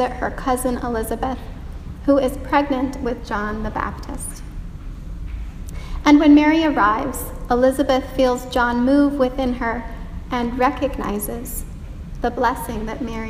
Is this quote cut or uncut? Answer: uncut